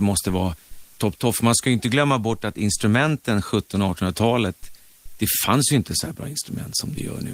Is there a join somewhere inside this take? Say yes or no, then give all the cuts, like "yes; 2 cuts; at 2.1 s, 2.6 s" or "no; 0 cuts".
yes; 1 cut; at 1.0 s